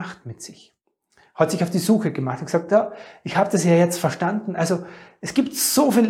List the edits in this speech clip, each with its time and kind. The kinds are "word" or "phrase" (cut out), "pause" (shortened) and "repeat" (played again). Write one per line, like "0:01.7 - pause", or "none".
none